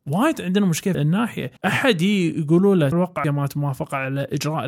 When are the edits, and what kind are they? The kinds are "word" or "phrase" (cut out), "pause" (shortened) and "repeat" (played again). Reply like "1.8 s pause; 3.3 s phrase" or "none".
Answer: 0.9 s word; 1.6 s pause; 2.9 s word; 3.2 s word